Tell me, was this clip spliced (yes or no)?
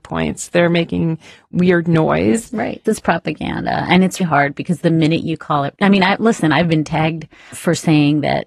yes